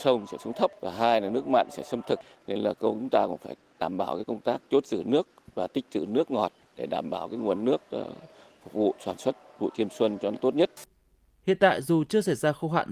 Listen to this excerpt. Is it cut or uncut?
uncut